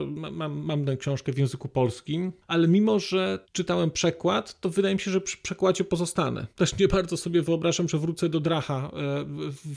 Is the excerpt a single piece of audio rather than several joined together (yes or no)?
no